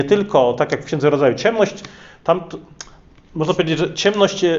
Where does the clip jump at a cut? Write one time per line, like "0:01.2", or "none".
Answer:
none